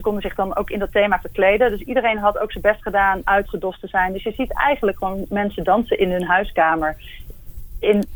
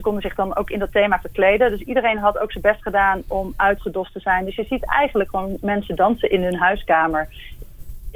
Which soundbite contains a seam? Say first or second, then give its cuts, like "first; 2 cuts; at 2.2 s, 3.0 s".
first; 1 cut; at 3.2 s